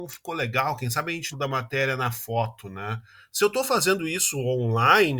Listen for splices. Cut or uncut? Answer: cut